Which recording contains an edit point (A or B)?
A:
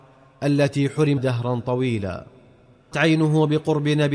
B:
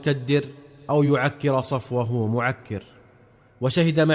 A